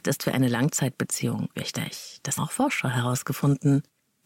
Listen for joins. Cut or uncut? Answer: cut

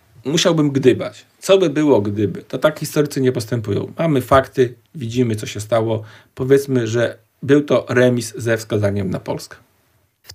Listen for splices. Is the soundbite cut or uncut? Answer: uncut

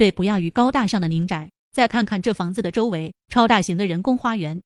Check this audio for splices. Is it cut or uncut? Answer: cut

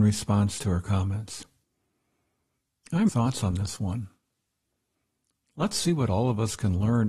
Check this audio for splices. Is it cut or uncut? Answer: cut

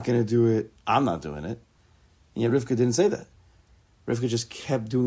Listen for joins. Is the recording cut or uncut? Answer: uncut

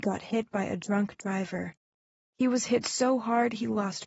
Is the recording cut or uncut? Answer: uncut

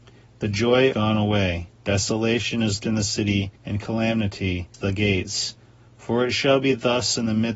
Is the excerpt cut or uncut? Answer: cut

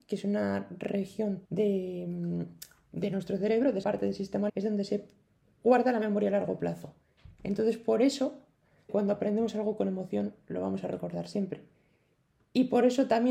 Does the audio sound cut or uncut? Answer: cut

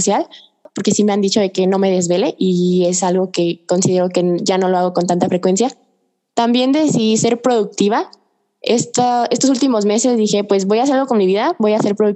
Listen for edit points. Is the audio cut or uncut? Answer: uncut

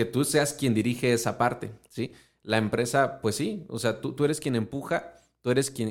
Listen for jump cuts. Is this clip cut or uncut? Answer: uncut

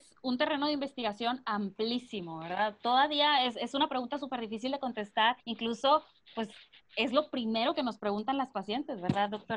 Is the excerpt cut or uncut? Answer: cut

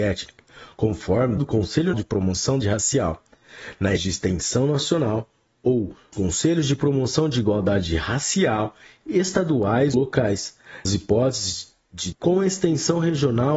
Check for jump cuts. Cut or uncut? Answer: cut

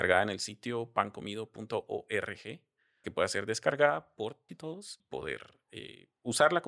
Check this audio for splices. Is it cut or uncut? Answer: cut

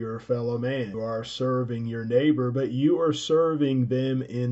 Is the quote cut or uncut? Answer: cut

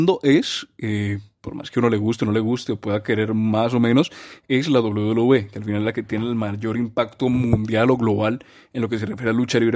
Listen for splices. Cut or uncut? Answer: uncut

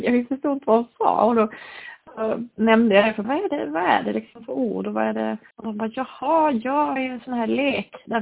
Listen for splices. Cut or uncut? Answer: cut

